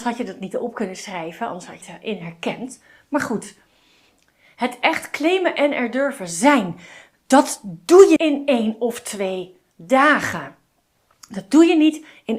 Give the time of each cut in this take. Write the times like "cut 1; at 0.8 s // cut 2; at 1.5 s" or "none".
cut 1; at 1.8 s // cut 2; at 8.2 s